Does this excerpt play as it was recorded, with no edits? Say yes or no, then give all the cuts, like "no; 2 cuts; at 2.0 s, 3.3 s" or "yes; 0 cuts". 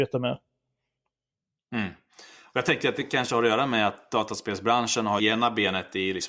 no; 1 cut; at 5.2 s